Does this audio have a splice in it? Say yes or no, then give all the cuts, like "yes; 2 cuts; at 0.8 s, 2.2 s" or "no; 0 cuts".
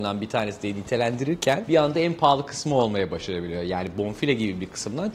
no; 0 cuts